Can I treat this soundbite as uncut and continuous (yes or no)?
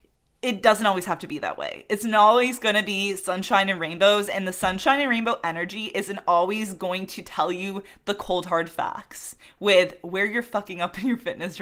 yes